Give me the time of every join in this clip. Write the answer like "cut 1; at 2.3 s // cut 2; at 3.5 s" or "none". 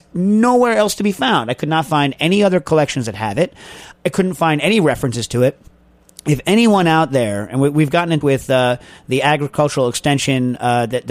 cut 1; at 8.2 s